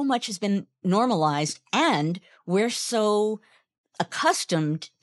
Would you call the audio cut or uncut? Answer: uncut